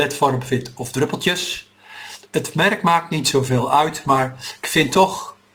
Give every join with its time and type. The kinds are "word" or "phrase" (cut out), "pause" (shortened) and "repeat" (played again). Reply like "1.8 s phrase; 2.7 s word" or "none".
none